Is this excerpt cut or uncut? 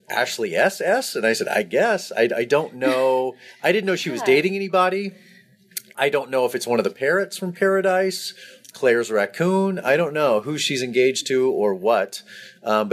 uncut